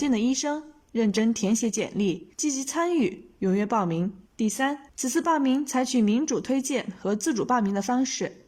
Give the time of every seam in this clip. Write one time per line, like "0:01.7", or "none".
0:02.3
0:04.3
0:04.9